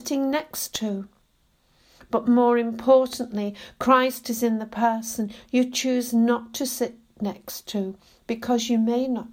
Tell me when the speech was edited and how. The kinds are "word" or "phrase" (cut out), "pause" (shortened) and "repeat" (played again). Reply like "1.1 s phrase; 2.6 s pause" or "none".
none